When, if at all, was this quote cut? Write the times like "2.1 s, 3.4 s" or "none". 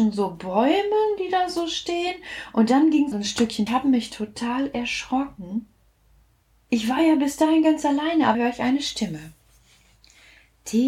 3.1 s, 3.7 s, 8.3 s